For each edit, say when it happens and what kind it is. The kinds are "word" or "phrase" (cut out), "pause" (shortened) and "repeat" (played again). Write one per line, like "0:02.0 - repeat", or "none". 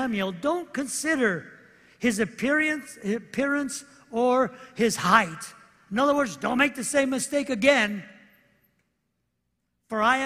none